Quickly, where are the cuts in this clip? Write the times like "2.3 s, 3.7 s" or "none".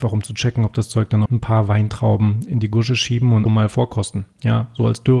1.3 s, 3.5 s